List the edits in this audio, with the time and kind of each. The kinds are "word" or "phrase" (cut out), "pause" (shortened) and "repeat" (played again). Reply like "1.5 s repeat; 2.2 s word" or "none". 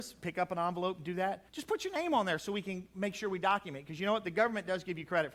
1.5 s pause